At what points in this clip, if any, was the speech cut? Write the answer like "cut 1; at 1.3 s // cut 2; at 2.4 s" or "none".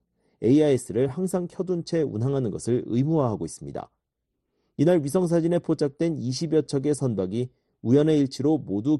none